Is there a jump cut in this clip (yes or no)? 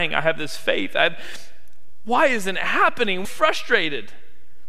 yes